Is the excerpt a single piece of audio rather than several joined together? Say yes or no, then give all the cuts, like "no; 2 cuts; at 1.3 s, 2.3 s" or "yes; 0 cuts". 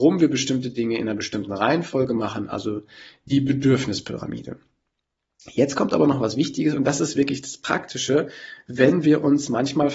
yes; 0 cuts